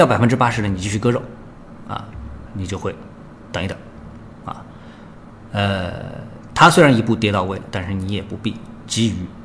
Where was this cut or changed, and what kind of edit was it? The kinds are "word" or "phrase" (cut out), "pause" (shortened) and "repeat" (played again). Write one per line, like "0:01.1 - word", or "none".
0:02.5 - word